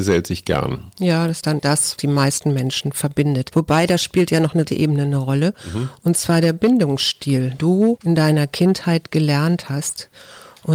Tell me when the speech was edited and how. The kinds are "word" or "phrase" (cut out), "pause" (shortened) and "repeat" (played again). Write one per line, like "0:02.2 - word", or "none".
0:01.4 - word
0:02.0 - word
0:04.7 - phrase
0:07.6 - word